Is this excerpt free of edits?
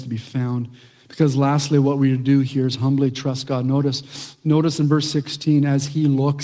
yes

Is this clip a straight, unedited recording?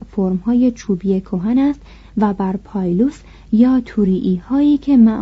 yes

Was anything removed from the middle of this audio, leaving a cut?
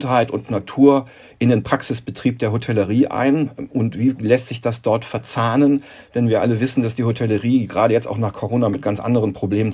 no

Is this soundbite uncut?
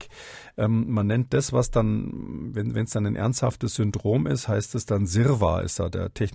yes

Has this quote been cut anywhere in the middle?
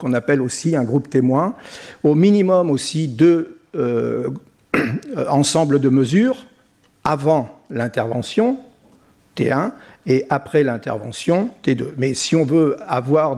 no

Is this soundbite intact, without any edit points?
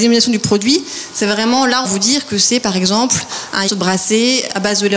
no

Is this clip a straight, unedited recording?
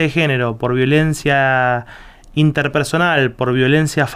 yes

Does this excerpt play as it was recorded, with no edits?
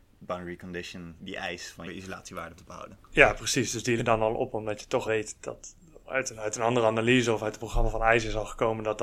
no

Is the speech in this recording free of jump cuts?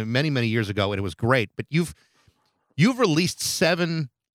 yes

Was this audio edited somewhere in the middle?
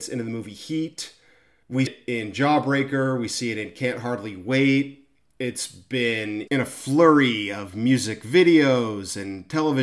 yes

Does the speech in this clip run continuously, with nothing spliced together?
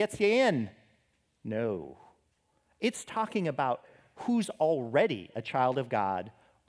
yes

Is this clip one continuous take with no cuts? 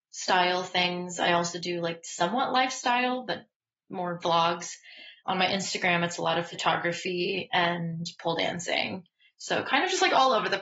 yes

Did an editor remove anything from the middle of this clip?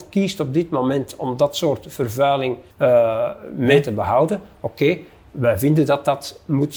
yes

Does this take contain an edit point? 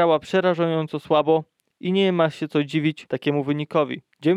no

